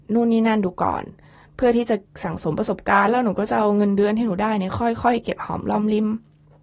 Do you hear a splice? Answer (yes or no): no